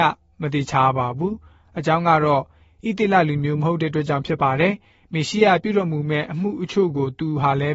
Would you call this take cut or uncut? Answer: uncut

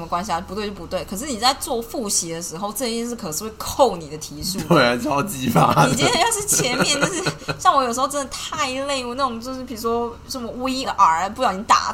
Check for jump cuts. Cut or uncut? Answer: cut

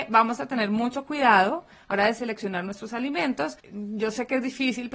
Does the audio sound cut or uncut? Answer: cut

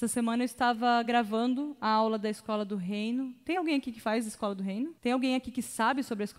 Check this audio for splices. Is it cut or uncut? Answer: uncut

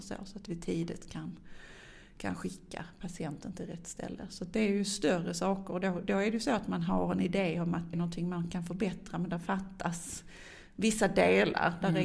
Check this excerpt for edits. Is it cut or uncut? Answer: cut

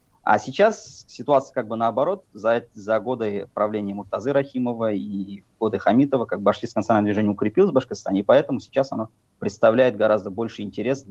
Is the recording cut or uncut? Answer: uncut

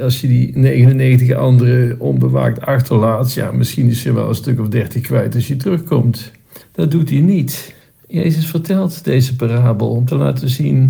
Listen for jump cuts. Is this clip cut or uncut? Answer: cut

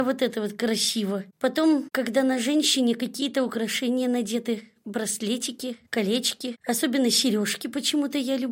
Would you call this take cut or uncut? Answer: uncut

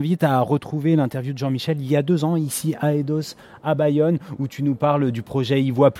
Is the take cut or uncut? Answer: uncut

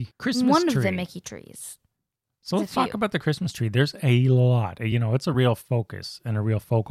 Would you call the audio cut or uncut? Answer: uncut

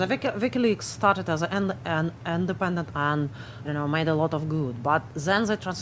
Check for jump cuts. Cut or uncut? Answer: cut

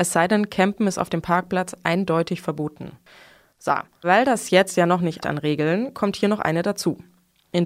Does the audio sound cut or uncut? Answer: cut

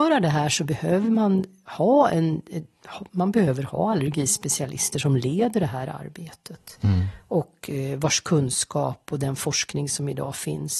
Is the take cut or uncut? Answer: uncut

